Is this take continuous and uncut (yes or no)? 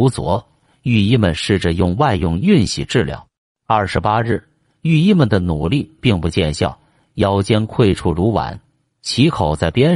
no